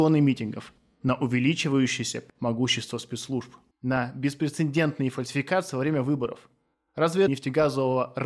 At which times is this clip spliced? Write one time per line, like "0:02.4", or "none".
0:02.3
0:03.7
0:07.3